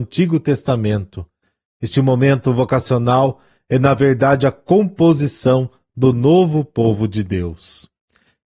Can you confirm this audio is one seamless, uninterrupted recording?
yes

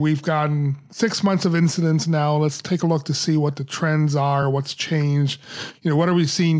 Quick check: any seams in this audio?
no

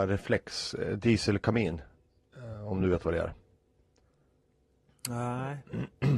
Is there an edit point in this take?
no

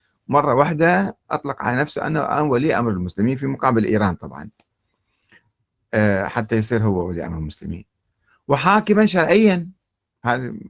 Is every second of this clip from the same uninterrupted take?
yes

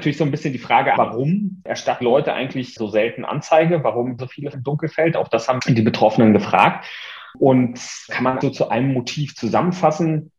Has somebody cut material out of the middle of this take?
yes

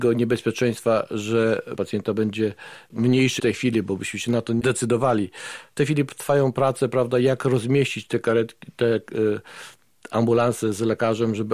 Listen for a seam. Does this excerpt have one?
yes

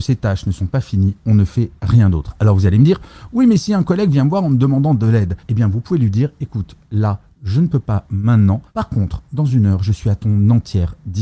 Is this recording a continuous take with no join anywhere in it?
no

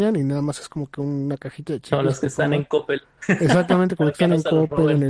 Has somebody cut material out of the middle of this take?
no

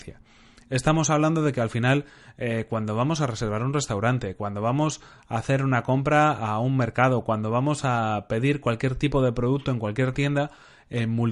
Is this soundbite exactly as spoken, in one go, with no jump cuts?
yes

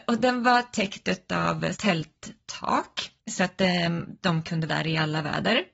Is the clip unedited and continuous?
no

